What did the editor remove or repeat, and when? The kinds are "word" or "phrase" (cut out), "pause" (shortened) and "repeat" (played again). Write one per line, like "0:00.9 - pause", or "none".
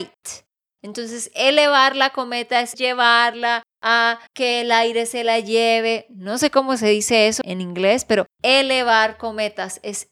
0:02.7 - word
0:04.3 - pause
0:07.4 - word
0:08.3 - pause